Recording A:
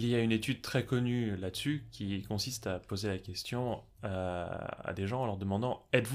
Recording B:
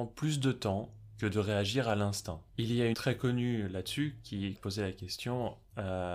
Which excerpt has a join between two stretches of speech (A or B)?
B